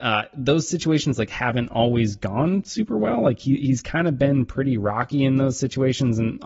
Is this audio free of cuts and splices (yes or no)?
yes